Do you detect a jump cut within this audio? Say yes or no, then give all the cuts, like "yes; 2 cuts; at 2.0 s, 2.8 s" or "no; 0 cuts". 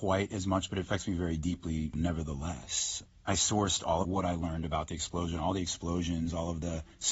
yes; 1 cut; at 4.0 s